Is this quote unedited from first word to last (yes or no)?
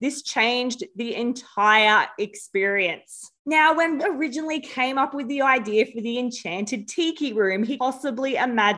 no